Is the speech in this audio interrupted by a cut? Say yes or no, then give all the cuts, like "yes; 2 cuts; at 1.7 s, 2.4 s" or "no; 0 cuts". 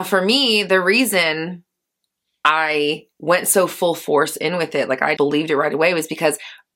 yes; 2 cuts; at 3.1 s, 5.2 s